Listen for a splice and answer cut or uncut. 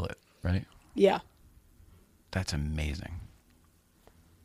uncut